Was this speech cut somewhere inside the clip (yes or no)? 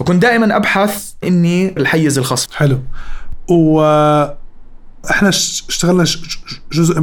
yes